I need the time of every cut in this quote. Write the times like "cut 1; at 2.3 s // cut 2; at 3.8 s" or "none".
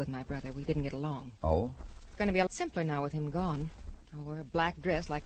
cut 1; at 1.4 s // cut 2; at 2.5 s // cut 3; at 4.0 s